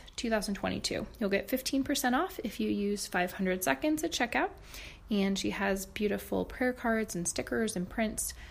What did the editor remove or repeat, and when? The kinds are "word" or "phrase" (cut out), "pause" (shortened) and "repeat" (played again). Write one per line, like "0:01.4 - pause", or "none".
none